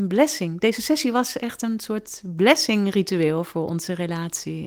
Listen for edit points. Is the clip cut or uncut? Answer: uncut